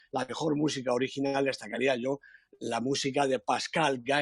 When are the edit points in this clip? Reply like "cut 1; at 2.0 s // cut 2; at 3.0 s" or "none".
none